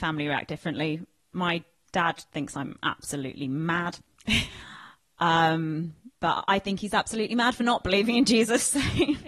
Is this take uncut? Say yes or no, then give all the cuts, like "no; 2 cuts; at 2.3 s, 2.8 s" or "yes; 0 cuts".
no; 1 cut; at 6.1 s